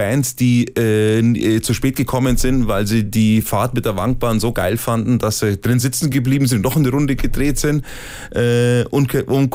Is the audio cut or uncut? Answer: uncut